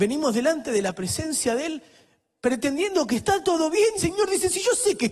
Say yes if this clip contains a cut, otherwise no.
yes